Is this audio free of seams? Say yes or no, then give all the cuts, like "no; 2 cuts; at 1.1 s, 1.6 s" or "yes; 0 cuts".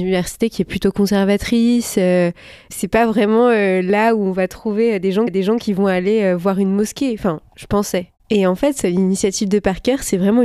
no; 2 cuts; at 5.3 s, 8.2 s